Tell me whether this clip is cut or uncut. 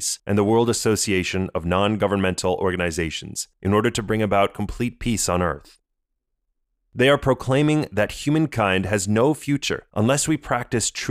uncut